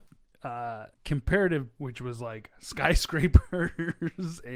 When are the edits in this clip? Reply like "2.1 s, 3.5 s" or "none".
0.9 s, 1.8 s